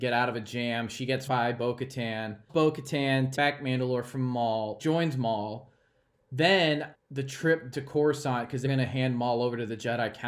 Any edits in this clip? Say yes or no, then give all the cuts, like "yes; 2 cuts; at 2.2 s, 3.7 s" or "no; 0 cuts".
yes; 7 cuts; at 1.3 s, 2.5 s, 3.4 s, 4.8 s, 6.9 s, 7.7 s, 8.7 s